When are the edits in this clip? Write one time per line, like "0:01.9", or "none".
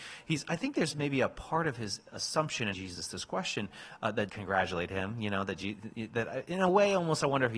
0:02.7
0:04.3